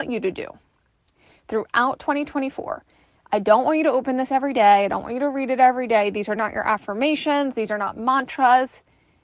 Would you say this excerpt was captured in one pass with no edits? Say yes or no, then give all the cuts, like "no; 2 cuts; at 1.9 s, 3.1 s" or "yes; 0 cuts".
yes; 0 cuts